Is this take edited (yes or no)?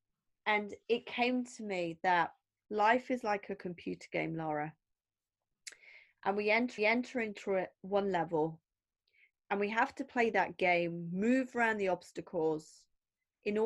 yes